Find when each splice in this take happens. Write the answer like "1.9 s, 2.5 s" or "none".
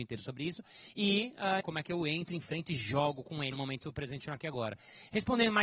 1.6 s, 3.5 s